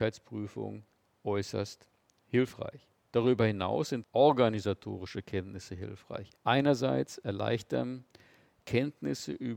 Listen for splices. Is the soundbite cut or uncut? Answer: cut